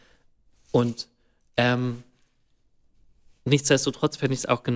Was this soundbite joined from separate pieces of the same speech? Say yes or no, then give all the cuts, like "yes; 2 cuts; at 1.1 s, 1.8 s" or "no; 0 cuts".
no; 0 cuts